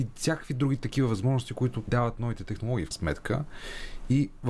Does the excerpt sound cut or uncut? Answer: cut